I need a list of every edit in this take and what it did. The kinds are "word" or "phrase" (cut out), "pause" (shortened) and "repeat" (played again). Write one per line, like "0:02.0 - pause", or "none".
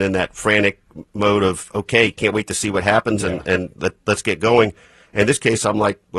none